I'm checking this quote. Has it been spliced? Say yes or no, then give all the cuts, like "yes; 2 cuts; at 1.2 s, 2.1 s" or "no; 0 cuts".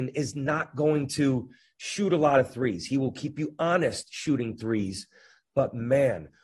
no; 0 cuts